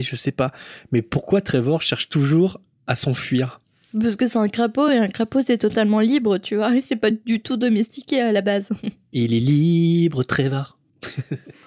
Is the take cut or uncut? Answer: uncut